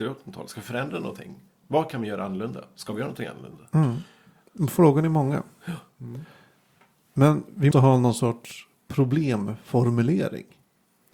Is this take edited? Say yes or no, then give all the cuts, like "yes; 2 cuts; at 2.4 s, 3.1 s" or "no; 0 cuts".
yes; 2 cuts; at 1.5 s, 7.7 s